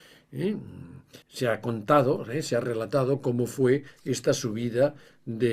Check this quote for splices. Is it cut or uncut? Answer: cut